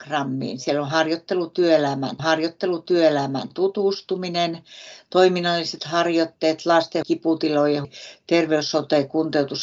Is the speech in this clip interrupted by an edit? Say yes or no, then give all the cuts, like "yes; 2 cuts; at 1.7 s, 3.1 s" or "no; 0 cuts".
yes; 3 cuts; at 2.2 s, 7.0 s, 7.8 s